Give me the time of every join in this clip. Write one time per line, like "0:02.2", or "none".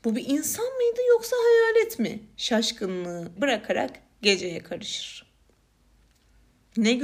0:03.4